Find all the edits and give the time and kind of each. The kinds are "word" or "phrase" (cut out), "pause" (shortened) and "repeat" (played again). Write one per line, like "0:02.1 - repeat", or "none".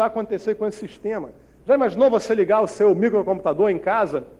none